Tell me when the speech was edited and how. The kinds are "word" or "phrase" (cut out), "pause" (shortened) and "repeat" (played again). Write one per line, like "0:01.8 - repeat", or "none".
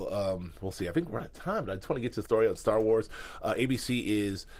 0:01.2 - word
0:02.3 - word